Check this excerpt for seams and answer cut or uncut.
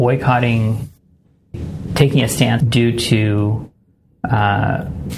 cut